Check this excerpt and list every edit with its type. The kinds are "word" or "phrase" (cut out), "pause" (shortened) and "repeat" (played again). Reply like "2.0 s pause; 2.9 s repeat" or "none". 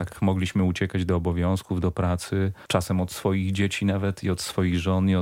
2.7 s pause